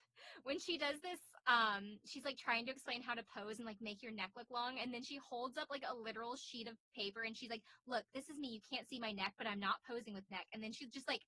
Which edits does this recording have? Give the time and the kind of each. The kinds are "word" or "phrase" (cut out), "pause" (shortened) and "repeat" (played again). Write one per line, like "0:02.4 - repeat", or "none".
none